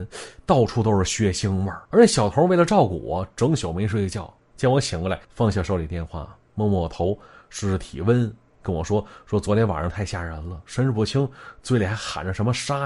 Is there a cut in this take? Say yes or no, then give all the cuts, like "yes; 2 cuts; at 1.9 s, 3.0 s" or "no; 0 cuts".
yes; 2 cuts; at 1.8 s, 5.2 s